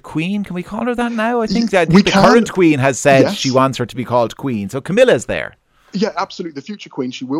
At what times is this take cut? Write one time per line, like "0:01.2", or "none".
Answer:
none